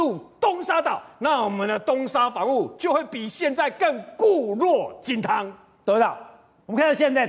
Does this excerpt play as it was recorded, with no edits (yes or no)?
yes